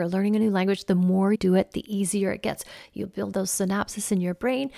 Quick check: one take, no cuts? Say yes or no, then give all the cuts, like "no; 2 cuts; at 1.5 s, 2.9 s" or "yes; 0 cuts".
no; 2 cuts; at 1.3 s, 3.3 s